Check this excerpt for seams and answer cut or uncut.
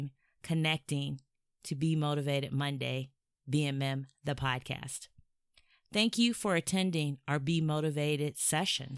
uncut